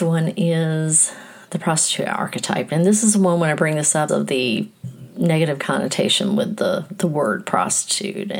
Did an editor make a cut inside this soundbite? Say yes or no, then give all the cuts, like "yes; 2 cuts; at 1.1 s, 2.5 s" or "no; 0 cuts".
yes; 1 cut; at 4.1 s